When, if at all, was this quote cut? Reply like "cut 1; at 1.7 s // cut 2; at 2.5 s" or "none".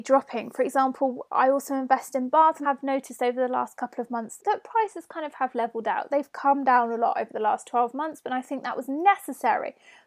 cut 1; at 2.6 s // cut 2; at 4.4 s